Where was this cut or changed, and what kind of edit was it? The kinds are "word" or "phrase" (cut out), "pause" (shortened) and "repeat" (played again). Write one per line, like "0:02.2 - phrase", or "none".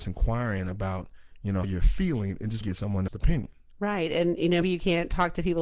0:01.6 - word
0:02.6 - word
0:03.1 - word
0:04.6 - word